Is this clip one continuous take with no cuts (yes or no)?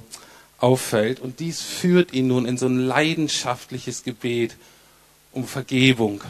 yes